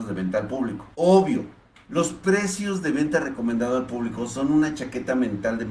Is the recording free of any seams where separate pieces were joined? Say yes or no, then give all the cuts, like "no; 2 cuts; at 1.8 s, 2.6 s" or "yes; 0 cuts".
no; 1 cut; at 0.9 s